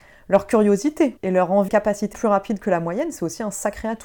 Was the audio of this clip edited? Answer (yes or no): yes